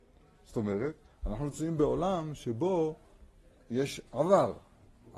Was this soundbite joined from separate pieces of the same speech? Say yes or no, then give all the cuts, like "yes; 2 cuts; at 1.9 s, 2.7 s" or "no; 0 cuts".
no; 0 cuts